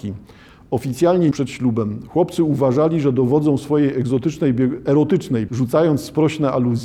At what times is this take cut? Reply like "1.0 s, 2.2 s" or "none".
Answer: 1.3 s, 5.5 s

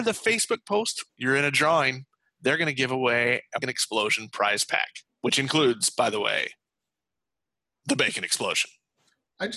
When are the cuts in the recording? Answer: 1.1 s, 3.6 s, 5.1 s

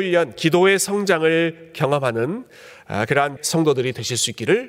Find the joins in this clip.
3.4 s

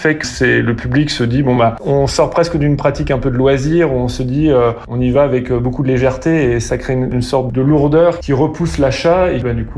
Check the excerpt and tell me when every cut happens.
none

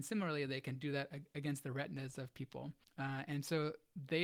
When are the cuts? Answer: 2.8 s

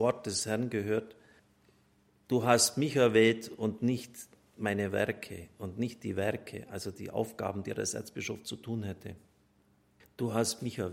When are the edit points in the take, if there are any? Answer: none

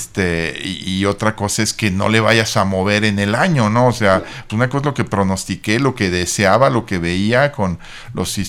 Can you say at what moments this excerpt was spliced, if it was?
4.5 s

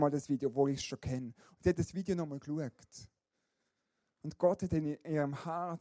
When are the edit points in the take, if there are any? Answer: none

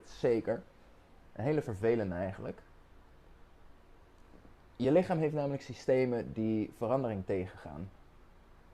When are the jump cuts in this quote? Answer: none

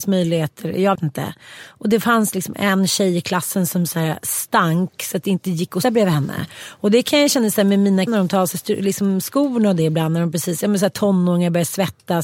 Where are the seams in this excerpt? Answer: 1.0 s, 5.8 s, 8.1 s

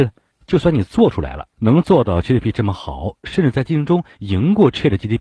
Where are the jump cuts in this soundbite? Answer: 1.5 s

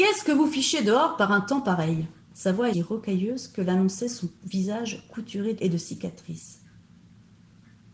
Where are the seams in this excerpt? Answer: 2.2 s, 2.7 s, 5.6 s

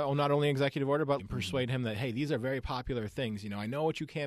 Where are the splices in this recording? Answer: 1.2 s

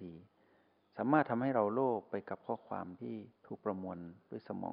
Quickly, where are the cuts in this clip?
3.4 s

